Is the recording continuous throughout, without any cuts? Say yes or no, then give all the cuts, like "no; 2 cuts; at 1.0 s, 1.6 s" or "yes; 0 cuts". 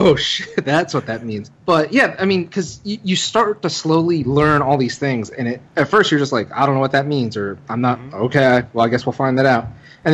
no; 2 cuts; at 1.6 s, 5.7 s